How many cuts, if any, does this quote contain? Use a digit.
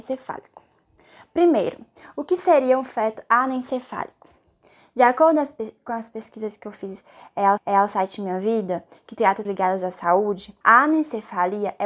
3